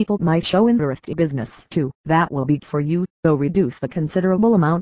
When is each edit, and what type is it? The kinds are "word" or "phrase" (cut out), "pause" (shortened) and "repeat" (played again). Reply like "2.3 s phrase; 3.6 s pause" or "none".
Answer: 1.1 s word; 2.0 s pause; 2.6 s word; 3.1 s pause